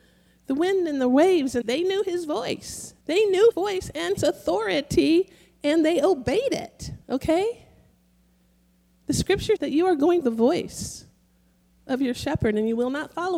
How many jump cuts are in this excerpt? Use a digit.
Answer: 7